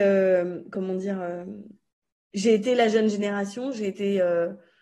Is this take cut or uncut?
uncut